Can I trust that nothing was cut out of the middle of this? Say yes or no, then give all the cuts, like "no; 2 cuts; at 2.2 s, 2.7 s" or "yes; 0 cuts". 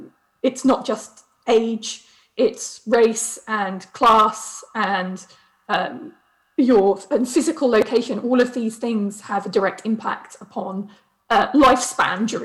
yes; 0 cuts